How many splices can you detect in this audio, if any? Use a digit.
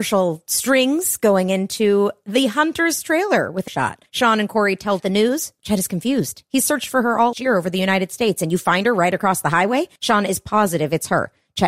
5